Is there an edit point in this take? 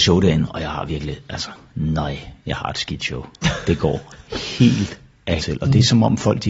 yes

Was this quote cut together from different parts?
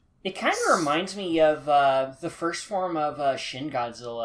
no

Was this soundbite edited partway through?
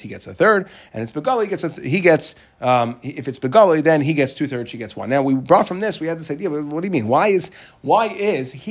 no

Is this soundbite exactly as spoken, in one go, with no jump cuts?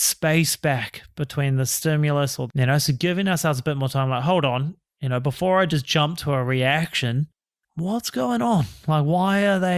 no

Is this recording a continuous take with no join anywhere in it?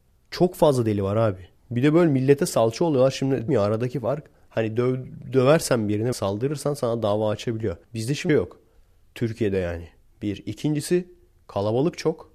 no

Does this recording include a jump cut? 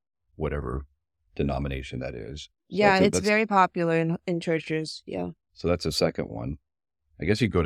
no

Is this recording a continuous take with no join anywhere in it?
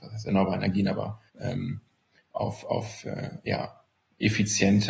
no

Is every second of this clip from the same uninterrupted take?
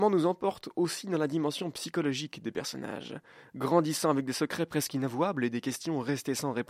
yes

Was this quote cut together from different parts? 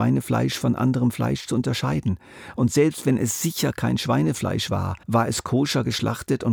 yes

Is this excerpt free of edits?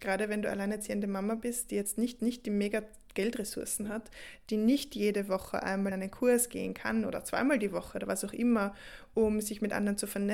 no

